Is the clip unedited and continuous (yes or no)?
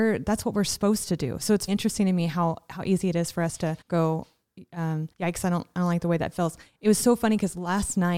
no